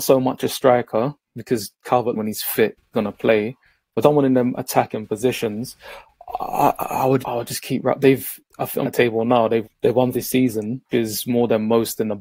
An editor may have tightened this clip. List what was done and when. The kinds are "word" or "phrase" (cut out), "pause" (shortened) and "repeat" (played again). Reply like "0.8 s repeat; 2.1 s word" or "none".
2.1 s word; 2.9 s word; 4.0 s word; 7.2 s word; 8.8 s word; 9.6 s word; 10.1 s word; 10.9 s word